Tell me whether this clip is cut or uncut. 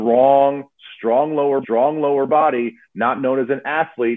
cut